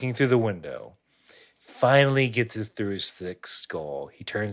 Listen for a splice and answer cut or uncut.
uncut